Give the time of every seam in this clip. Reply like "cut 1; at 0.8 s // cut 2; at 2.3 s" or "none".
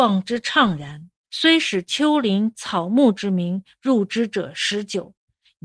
cut 1; at 1.2 s

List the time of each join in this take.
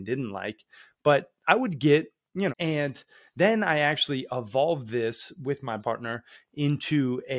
cut 1; at 2.5 s // cut 2; at 5.8 s

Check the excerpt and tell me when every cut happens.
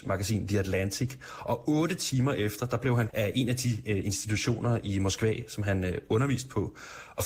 cut 1; at 3.1 s

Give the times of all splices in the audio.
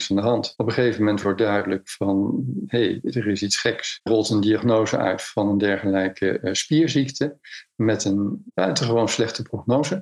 cut 1; at 4.1 s

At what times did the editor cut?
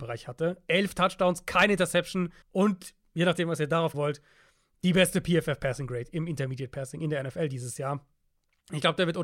cut 1; at 2.4 s // cut 2; at 3.9 s

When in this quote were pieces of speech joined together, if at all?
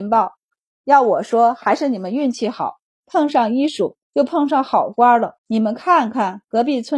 cut 1; at 4.0 s // cut 2; at 5.4 s

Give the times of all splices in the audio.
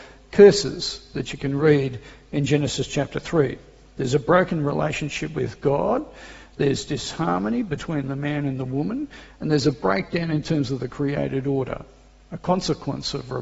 none

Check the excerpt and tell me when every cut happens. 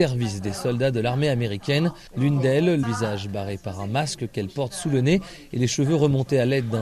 cut 1; at 2.1 s // cut 2; at 2.8 s

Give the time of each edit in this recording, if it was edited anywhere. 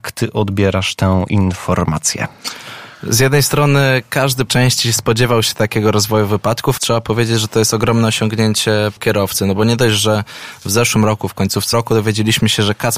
cut 1; at 4.5 s // cut 2; at 6.8 s // cut 3; at 9.0 s // cut 4; at 11.7 s

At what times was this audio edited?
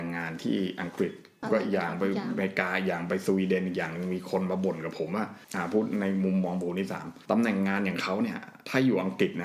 cut 1; at 7.2 s

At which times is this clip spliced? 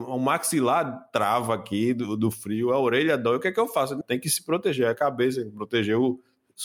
cut 1; at 4.0 s

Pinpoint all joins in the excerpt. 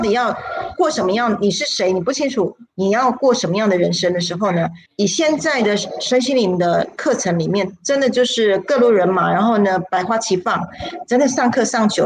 cut 1; at 4.9 s

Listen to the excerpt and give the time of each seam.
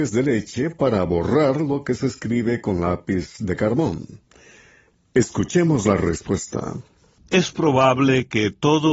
none

